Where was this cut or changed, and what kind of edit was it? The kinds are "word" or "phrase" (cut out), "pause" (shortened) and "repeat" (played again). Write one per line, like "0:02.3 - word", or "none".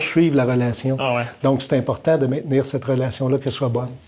none